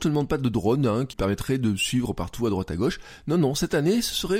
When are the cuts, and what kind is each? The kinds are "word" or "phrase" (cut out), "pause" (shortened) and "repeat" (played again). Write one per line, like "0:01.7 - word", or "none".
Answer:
0:01.1 - word